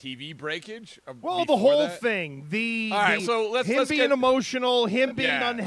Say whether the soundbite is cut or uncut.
cut